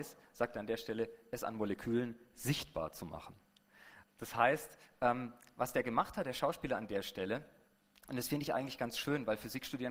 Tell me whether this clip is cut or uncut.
uncut